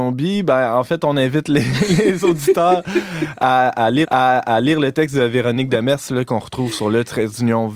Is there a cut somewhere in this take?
yes; 1 cut; at 4.0 s

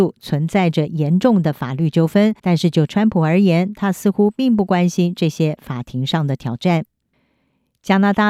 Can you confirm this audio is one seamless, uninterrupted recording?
no; 1 cut; at 2.4 s

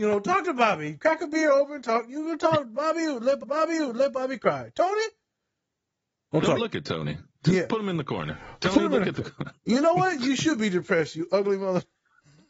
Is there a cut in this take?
yes; 3 cuts; at 3.4 s, 6.6 s, 9.6 s

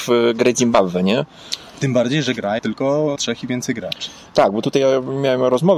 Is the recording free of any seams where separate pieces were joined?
no; 2 cuts; at 2.6 s, 3.2 s

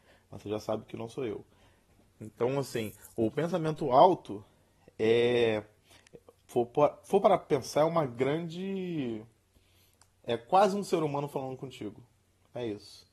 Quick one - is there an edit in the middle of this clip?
no; 0 cuts

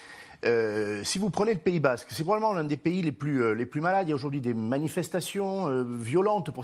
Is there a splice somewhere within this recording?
no; 0 cuts

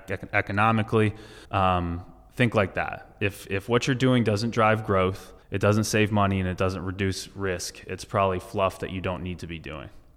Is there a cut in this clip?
yes; 2 cuts; at 1.4 s, 5.4 s

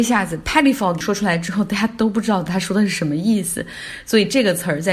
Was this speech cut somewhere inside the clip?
yes; 1 cut; at 1.0 s

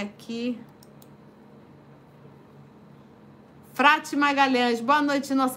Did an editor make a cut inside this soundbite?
no; 0 cuts

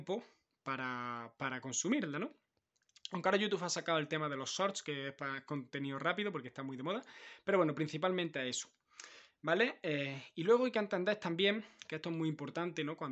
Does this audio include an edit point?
no; 0 cuts

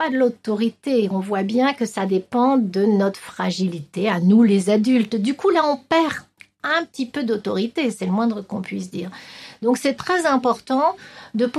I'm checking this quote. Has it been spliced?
no; 0 cuts

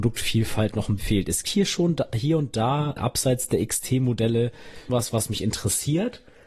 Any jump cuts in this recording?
yes; 4 cuts; at 1.0 s, 1.4 s, 3.0 s, 4.9 s

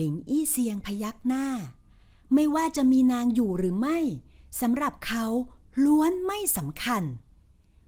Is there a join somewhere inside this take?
no; 0 cuts

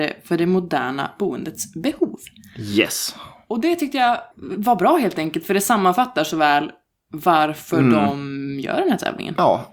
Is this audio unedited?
no; 1 cut; at 4.3 s

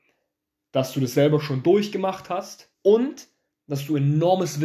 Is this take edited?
yes; 1 cut; at 2.7 s

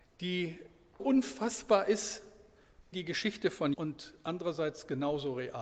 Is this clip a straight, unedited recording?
no; 3 cuts; at 1.0 s, 2.9 s, 3.7 s

